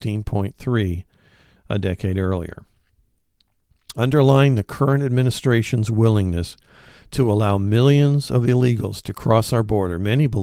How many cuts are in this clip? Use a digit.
0